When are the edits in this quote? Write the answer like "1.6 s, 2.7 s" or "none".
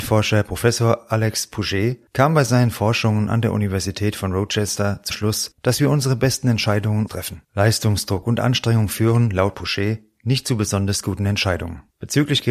5.1 s, 7.1 s, 9.5 s